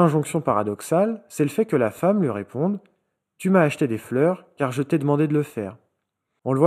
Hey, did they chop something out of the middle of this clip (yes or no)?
no